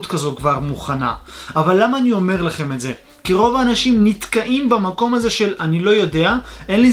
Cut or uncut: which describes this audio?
uncut